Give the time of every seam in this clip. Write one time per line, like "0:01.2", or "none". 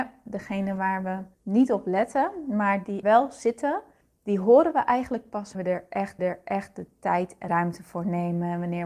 0:01.3
0:03.0
0:04.0
0:05.5
0:06.2
0:07.5